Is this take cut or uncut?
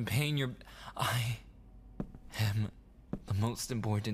uncut